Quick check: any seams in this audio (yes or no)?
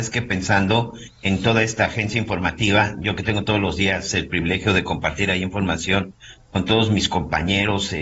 no